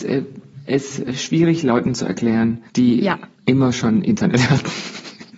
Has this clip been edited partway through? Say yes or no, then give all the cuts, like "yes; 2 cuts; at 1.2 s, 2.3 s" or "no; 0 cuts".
yes; 2 cuts; at 2.7 s, 3.3 s